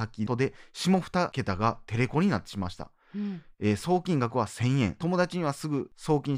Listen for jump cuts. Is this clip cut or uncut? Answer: cut